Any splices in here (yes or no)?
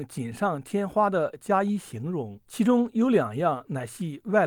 yes